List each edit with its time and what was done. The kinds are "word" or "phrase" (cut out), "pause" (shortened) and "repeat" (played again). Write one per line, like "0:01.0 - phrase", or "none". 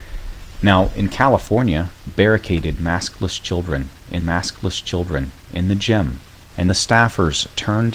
0:02.1 - phrase
0:04.2 - repeat
0:06.7 - word